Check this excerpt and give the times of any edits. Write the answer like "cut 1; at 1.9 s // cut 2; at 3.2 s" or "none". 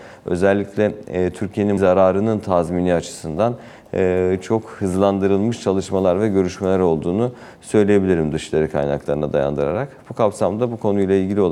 cut 1; at 1.8 s